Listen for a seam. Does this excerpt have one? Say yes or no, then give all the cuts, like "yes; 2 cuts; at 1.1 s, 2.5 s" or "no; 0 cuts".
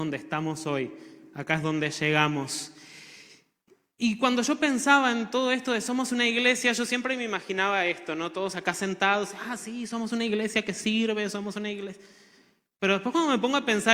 no; 0 cuts